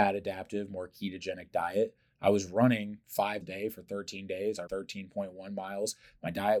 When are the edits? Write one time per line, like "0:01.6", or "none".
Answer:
0:03.4
0:04.7